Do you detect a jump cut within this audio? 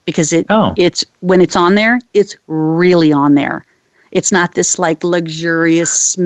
no; 0 cuts

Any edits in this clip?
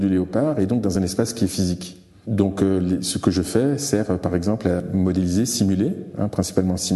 no; 0 cuts

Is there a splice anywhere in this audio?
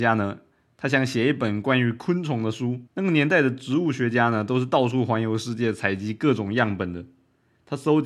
yes; 1 cut; at 2.9 s

